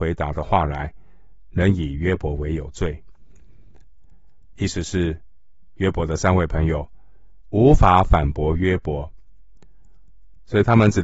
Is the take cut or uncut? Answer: uncut